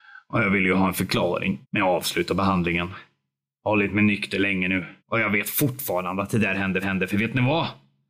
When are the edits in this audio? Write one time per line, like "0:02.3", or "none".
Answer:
0:01.6
0:05.0
0:06.8